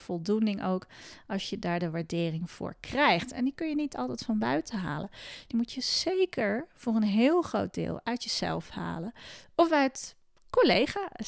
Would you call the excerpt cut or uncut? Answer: uncut